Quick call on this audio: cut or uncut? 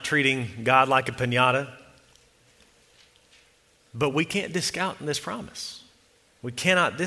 uncut